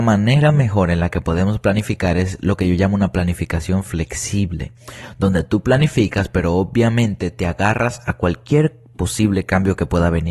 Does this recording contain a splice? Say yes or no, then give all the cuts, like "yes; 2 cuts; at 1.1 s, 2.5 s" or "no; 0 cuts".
no; 0 cuts